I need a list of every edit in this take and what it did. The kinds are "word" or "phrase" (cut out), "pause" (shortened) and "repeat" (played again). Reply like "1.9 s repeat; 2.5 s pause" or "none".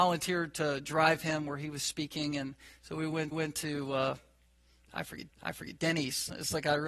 3.3 s repeat; 5.3 s repeat